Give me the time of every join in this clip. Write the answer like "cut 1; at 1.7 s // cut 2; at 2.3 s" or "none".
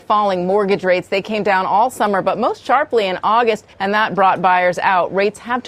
cut 1; at 3.7 s

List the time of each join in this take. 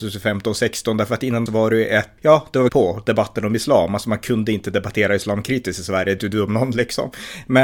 cut 1; at 1.5 s // cut 2; at 2.2 s // cut 3; at 2.7 s // cut 4; at 6.2 s

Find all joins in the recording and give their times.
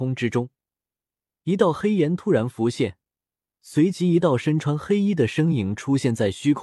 none

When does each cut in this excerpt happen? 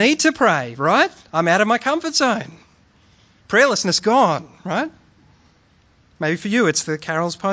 none

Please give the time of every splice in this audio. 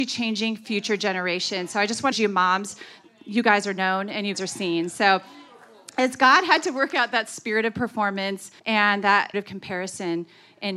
cut 1; at 2.1 s // cut 2; at 4.3 s // cut 3; at 8.6 s // cut 4; at 9.3 s

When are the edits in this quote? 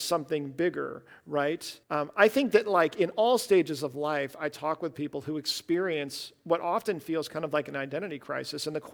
cut 1; at 1.8 s

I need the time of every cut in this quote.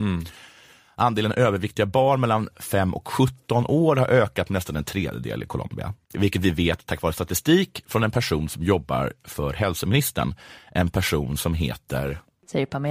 cut 1; at 6.0 s

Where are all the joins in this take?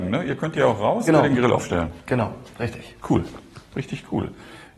cut 1; at 1.1 s // cut 2; at 3.0 s

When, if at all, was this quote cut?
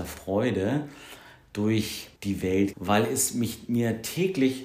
cut 1; at 2.2 s // cut 2; at 2.7 s

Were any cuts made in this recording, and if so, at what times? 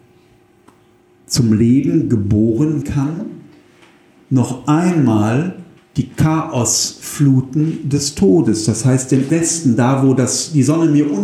cut 1; at 2.8 s // cut 2; at 5.8 s // cut 3; at 9.3 s

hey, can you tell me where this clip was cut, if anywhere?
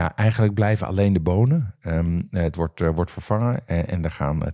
cut 1; at 2.5 s

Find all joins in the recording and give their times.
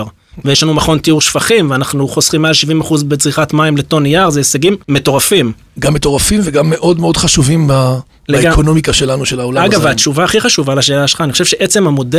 cut 1; at 4.8 s

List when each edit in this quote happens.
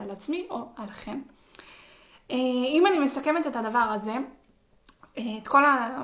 none

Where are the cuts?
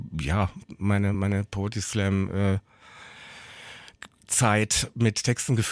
none

